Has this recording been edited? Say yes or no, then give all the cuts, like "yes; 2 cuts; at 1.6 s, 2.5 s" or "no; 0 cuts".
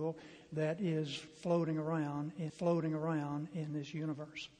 yes; 1 cut; at 2.5 s